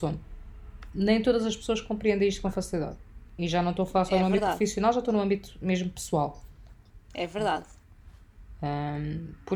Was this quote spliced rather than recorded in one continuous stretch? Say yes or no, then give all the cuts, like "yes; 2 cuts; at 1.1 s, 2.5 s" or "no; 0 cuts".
no; 0 cuts